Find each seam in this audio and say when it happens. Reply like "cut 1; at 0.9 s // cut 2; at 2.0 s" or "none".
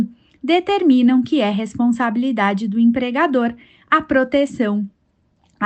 none